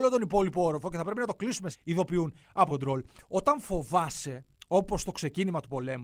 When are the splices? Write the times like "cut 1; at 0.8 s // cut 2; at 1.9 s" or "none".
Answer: cut 1; at 1.7 s // cut 2; at 2.7 s